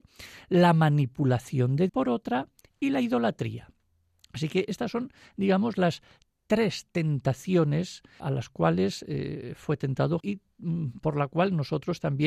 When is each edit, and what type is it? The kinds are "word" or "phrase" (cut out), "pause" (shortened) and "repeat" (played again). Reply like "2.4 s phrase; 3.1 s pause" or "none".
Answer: 1.9 s word; 8.2 s word; 10.2 s word